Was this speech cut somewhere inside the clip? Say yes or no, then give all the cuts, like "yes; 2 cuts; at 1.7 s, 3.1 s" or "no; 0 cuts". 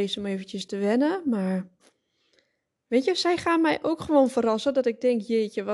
no; 0 cuts